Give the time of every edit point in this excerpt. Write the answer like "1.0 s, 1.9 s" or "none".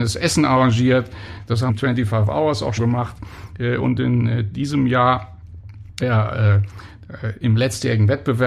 1.7 s, 2.8 s, 6.0 s